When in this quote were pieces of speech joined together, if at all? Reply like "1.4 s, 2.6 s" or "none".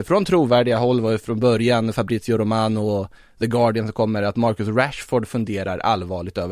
none

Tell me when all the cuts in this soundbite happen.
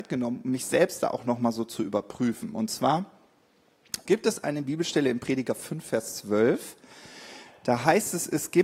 4.1 s

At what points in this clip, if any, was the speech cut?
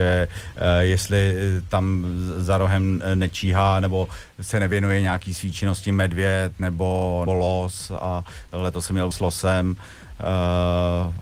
7.3 s, 9.1 s

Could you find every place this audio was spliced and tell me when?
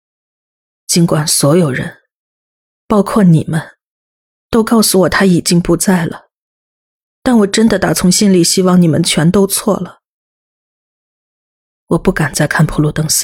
none

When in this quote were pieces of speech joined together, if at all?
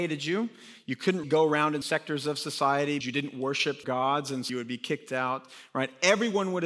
1.2 s, 1.8 s, 3.0 s, 3.8 s, 4.5 s

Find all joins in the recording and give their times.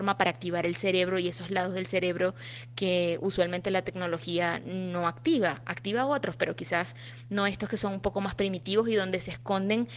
none

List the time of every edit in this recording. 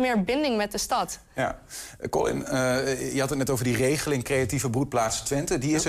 none

